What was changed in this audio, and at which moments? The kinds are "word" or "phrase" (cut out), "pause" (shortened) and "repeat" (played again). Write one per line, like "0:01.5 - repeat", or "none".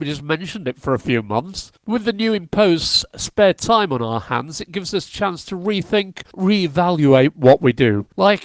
none